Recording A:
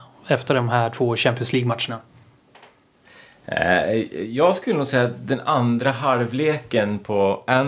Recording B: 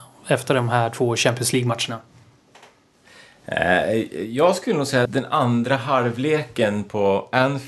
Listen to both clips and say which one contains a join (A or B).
B